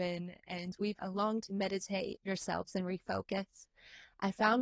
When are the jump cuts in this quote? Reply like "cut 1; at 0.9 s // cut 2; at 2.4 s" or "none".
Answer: cut 1; at 1.0 s // cut 2; at 1.4 s // cut 3; at 2.3 s